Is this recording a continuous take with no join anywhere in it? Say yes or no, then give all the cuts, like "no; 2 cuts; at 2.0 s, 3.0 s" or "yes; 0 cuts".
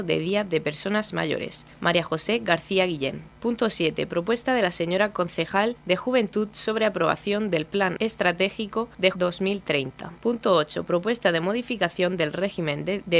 no; 1 cut; at 9.1 s